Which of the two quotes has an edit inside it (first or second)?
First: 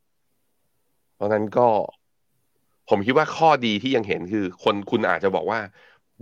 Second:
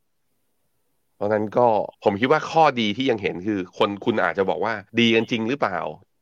second